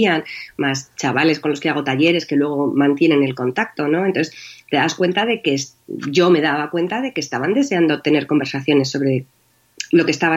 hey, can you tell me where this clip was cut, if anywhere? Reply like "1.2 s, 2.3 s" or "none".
none